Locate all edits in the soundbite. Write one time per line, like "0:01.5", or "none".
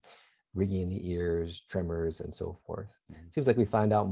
none